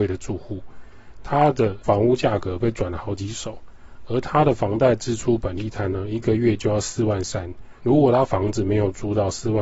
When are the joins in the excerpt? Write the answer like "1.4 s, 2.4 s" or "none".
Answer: 7.8 s

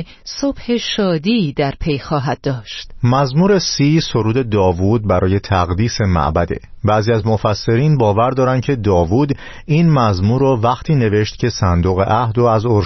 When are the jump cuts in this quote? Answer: none

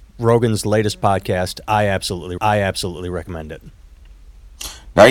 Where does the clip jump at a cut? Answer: 2.4 s

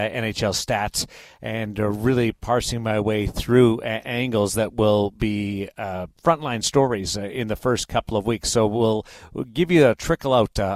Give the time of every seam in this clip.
6.1 s

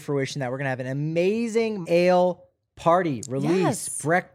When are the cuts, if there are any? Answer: 1.8 s

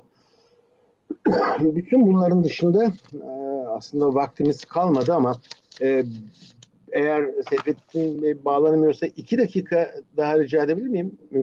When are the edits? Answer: none

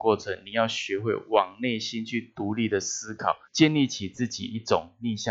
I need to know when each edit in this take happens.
3.4 s

